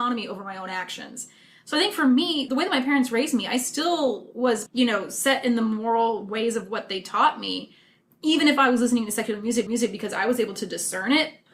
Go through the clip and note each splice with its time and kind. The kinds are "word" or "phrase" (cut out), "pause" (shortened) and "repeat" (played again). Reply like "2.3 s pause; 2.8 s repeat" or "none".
2.5 s word; 4.7 s word; 9.7 s repeat